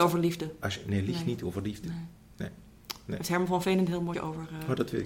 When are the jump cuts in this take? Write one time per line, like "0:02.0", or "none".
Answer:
0:04.1